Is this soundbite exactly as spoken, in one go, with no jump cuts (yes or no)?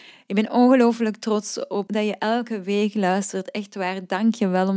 no